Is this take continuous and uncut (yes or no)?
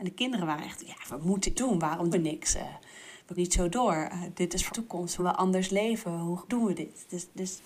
no